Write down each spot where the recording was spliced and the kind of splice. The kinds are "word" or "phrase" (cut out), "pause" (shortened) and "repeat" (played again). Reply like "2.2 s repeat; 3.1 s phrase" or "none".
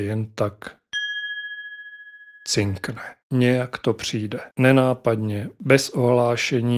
3.2 s pause; 4.5 s pause